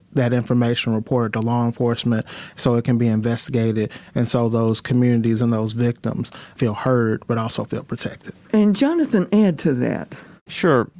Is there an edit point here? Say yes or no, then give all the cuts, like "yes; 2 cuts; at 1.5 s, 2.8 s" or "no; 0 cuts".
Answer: no; 0 cuts